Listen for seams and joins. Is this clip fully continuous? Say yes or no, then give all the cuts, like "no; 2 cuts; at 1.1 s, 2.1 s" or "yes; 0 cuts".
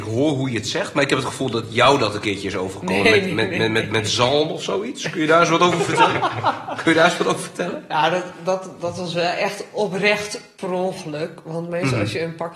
yes; 0 cuts